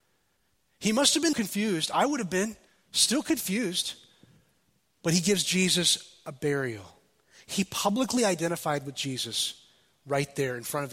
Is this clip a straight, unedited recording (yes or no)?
no